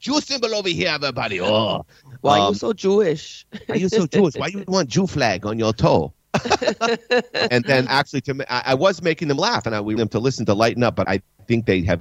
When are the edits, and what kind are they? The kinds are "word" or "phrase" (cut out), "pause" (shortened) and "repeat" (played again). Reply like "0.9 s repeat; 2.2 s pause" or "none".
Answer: 7.5 s word; 7.9 s word; 10.0 s phrase; 11.0 s word

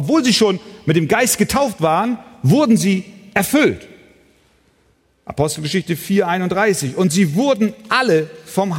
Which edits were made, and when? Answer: none

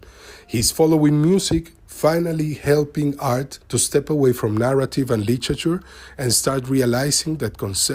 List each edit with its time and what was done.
3.6 s pause

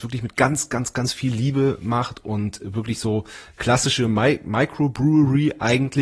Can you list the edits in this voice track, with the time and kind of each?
none

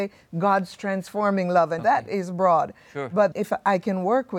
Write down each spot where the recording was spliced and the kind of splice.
1.8 s word; 3.3 s word

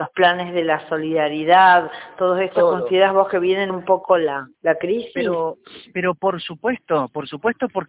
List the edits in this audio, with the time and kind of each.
3.7 s phrase; 4.5 s pause

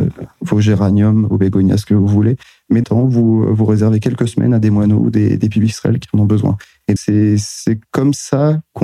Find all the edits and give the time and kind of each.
2.8 s phrase; 7.0 s word

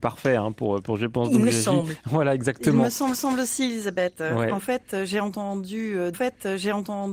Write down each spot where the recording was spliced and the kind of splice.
3.1 s repeat; 6.1 s repeat

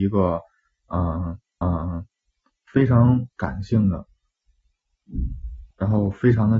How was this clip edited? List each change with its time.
1.6 s repeat; 3.3 s pause; 5.7 s pause

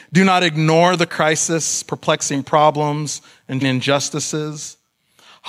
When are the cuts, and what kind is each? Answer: 1.1 s word; 3.6 s word

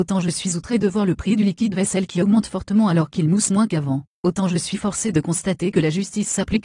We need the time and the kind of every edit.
none

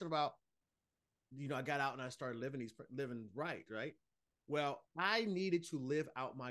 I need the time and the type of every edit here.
4.9 s pause

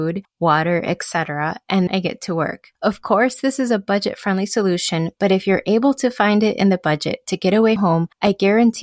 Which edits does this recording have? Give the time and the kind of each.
1.9 s word; 7.8 s word

